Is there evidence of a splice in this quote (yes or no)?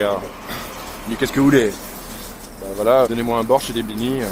yes